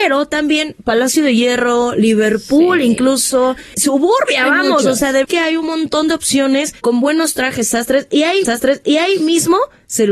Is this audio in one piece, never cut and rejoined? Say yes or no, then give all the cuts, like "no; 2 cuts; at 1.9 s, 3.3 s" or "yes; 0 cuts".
no; 3 cuts; at 3.7 s, 5.2 s, 8.4 s